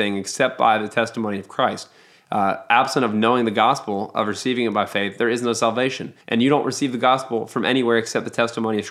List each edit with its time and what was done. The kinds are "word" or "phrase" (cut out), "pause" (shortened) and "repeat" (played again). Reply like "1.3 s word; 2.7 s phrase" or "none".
6.2 s pause